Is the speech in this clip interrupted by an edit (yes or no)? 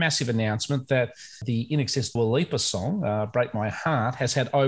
yes